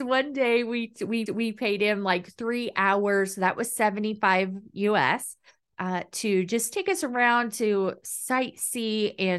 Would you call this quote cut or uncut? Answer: cut